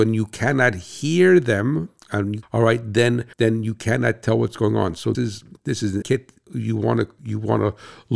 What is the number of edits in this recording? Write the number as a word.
four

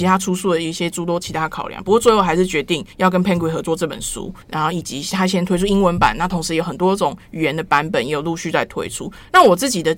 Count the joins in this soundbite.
two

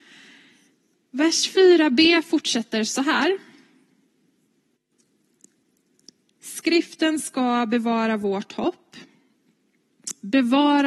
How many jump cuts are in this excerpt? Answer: zero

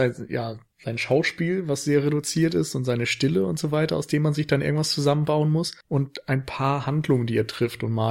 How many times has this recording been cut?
one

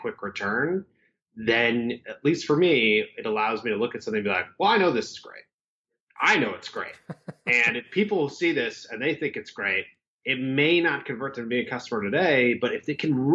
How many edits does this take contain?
zero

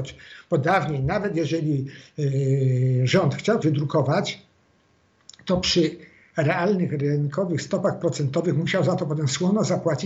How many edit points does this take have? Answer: one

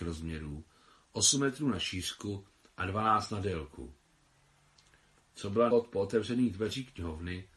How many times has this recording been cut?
two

